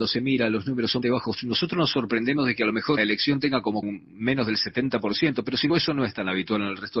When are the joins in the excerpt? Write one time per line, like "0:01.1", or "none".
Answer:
0:01.0
0:03.0
0:03.8
0:05.7